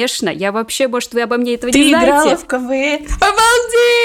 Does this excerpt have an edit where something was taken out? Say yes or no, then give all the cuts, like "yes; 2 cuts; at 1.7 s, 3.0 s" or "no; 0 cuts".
no; 0 cuts